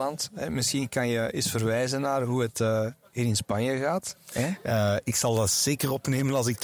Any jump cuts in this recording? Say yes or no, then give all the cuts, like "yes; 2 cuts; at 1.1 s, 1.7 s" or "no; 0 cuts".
no; 0 cuts